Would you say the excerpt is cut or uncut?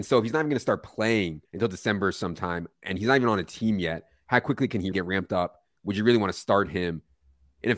cut